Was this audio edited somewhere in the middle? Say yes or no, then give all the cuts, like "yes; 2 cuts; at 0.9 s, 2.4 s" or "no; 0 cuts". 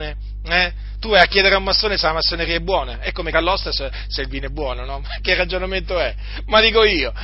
yes; 2 cuts; at 3.3 s, 4.2 s